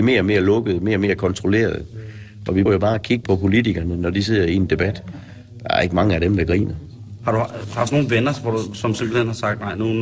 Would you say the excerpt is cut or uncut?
cut